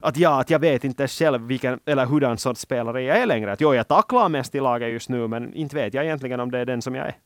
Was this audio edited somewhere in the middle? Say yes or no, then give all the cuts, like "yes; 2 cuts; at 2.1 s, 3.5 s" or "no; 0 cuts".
no; 0 cuts